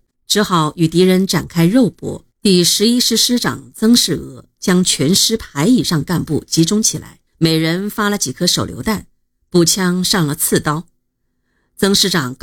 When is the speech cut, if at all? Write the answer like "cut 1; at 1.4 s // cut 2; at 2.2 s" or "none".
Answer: cut 1; at 2.3 s // cut 2; at 7.3 s